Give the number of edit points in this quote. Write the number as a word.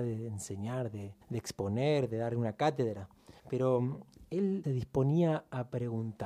three